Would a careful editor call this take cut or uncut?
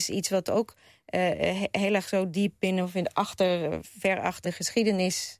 cut